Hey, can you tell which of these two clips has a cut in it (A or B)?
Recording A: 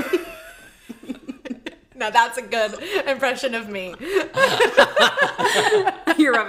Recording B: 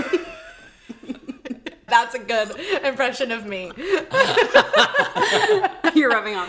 B